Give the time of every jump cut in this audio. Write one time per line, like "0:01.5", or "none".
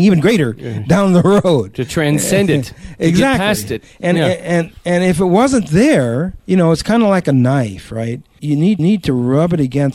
0:06.4
0:08.4
0:08.8